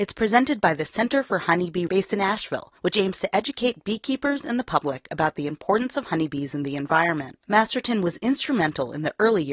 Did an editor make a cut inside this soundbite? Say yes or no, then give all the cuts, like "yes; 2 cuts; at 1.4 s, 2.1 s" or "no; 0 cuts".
yes; 3 cuts; at 1.9 s, 2.8 s, 7.4 s